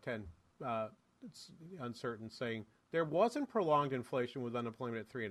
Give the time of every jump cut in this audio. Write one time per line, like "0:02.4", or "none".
none